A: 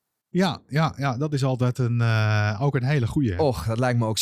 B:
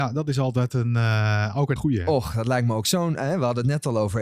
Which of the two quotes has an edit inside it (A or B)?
B